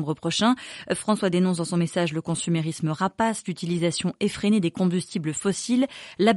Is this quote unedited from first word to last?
yes; 0 cuts

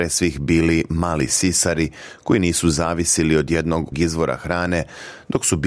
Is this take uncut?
no; 1 cut; at 3.9 s

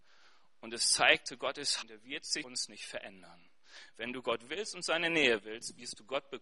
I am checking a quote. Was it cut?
yes; 2 cuts; at 1.8 s, 2.4 s

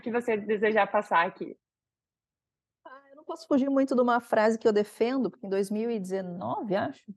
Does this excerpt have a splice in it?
no; 0 cuts

